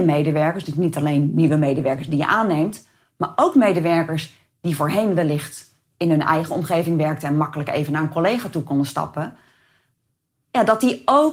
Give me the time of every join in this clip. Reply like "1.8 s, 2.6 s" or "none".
none

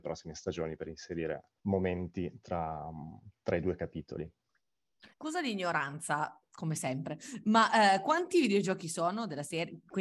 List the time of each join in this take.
1.6 s, 3.4 s, 5.1 s

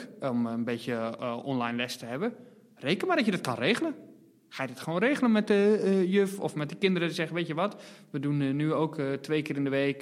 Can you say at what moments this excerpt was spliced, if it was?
none

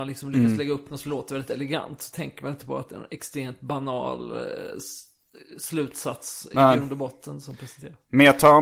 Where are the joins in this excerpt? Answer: none

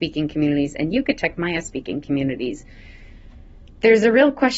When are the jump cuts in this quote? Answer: none

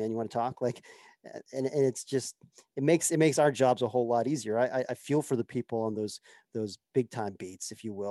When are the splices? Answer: none

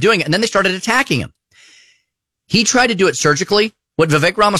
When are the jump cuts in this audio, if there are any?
none

